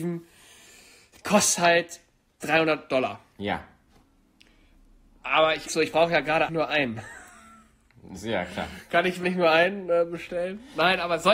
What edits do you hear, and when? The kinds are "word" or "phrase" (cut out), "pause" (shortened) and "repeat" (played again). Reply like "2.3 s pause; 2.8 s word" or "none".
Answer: 2.4 s word; 5.7 s word; 6.5 s word; 9.2 s word